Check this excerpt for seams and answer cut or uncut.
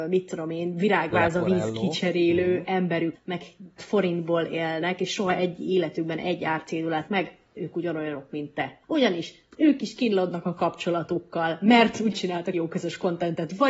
cut